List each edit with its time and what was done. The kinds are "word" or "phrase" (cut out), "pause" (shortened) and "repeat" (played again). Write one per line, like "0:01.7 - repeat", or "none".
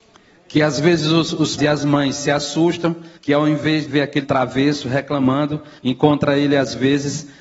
0:01.6 - word
0:03.2 - pause
0:03.9 - word
0:04.2 - word
0:05.8 - pause